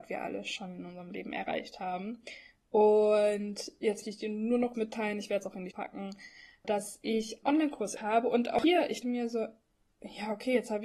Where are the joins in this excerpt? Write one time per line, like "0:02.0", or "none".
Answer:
0:04.0
0:04.7
0:05.7
0:06.6
0:07.4
0:08.0
0:09.0